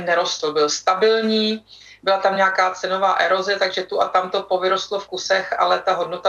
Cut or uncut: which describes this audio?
uncut